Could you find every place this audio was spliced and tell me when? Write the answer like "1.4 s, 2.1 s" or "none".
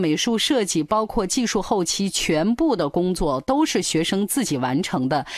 none